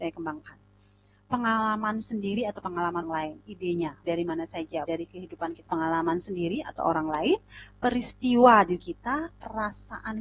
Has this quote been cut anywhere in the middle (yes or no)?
yes